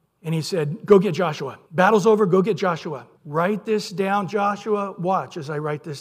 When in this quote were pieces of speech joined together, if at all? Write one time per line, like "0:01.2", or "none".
0:01.7
0:03.2